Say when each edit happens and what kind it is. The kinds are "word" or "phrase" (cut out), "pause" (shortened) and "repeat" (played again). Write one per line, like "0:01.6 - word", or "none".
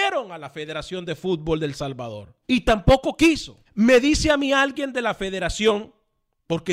0:02.4 - pause
0:03.7 - pause

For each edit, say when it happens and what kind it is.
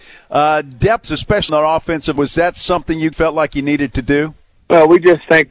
0:01.0 - word
0:01.5 - word
0:02.2 - word
0:03.1 - word

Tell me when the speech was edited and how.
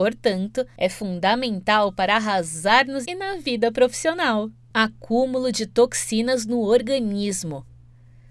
0:03.0 - word

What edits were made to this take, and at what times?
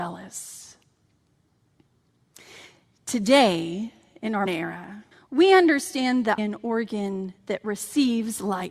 0:04.5 - word
0:05.1 - pause
0:06.4 - phrase

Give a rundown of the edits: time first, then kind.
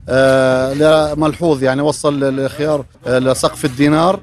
0:02.9 - pause

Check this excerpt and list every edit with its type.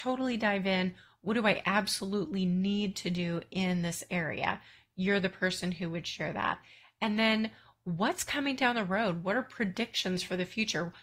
none

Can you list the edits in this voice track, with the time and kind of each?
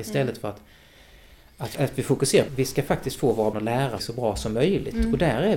0:01.7 - word
0:02.5 - word
0:03.5 - word
0:04.0 - word

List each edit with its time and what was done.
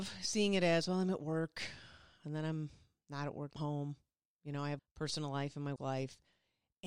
0:03.6 - word
0:04.8 - word
0:05.8 - word

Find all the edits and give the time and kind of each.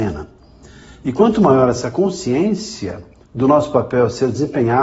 none

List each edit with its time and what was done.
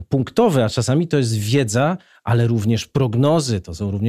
none

